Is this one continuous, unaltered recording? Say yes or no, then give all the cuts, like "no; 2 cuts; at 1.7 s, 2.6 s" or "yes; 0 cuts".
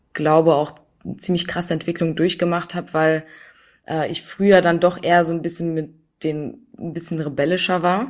yes; 0 cuts